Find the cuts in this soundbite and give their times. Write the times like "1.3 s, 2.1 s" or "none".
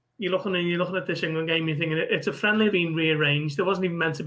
2.7 s